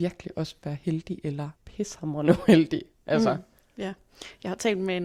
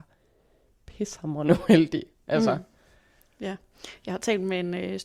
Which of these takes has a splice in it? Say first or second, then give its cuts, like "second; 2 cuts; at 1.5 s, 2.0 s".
first; 2 cuts; at 1.6 s, 3.6 s